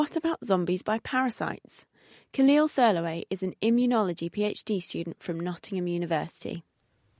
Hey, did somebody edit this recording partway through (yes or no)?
no